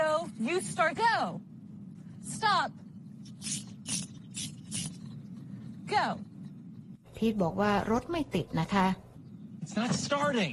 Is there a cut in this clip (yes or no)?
yes